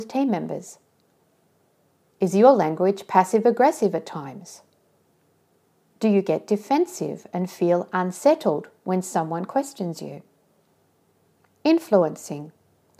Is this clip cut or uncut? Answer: uncut